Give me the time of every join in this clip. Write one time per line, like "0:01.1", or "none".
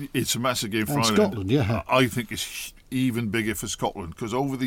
none